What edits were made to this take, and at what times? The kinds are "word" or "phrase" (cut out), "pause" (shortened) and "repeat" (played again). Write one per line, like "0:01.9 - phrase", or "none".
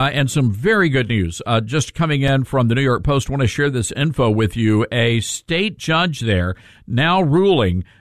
none